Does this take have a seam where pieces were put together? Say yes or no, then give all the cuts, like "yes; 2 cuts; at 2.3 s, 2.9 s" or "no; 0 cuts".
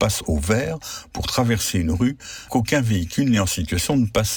yes; 1 cut; at 2.5 s